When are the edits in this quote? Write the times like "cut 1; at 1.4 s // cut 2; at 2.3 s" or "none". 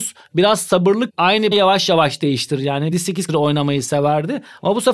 cut 1; at 1.1 s // cut 2; at 1.5 s // cut 3; at 2.9 s // cut 4; at 3.3 s